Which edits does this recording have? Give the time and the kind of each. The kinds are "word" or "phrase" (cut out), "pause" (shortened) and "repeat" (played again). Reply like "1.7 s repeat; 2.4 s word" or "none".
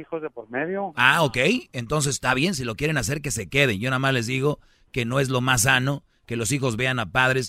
none